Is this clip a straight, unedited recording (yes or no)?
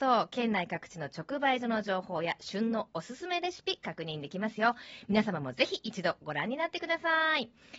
yes